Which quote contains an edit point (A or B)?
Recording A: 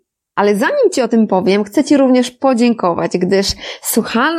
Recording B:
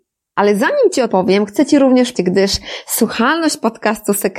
B